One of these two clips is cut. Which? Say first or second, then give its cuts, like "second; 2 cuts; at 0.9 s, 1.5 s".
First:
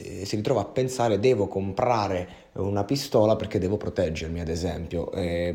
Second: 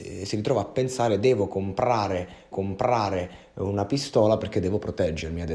second; 1 cut; at 2.5 s